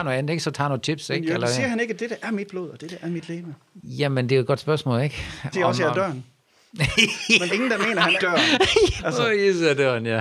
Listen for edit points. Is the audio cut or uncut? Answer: cut